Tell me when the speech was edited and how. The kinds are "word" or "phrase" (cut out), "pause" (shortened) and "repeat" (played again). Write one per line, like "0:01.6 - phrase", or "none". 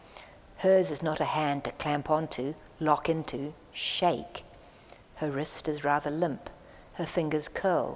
none